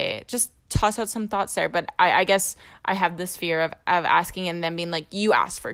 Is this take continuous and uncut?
yes; 0 cuts

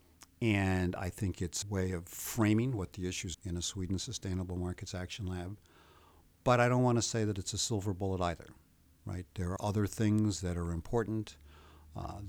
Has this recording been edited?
yes; 3 cuts; at 1.6 s, 3.3 s, 9.6 s

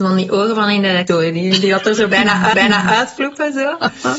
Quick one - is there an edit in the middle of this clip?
yes; 2 cuts; at 1.1 s, 2.5 s

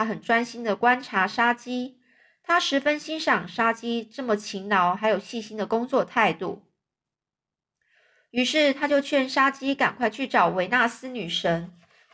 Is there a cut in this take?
no; 0 cuts

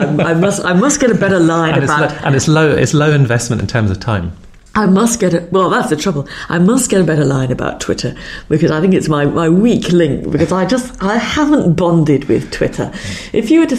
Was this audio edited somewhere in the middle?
no; 0 cuts

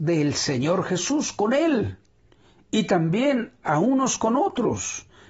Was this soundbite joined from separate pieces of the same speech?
no; 0 cuts

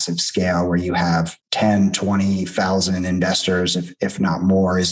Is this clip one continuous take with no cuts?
no; 1 cut; at 1.4 s

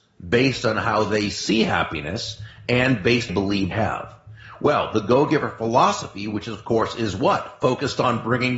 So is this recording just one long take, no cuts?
no; 2 cuts; at 3.3 s, 3.7 s

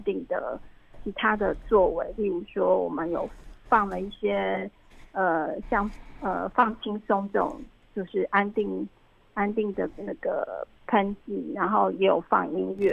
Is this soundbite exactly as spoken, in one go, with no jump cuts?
yes; 0 cuts

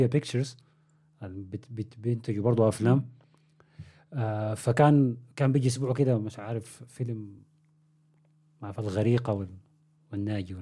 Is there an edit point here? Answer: no; 0 cuts

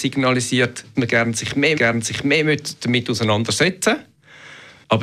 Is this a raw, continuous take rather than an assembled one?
no; 2 cuts; at 0.9 s, 1.7 s

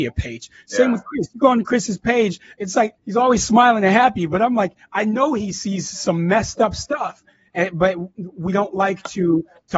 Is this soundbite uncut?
no; 1 cut; at 3.0 s

